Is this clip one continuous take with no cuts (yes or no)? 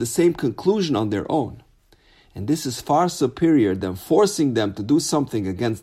yes